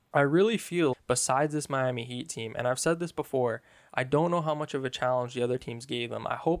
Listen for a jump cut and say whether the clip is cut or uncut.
cut